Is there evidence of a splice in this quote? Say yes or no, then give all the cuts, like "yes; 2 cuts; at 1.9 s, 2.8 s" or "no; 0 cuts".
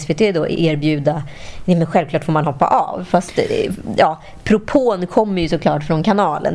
no; 0 cuts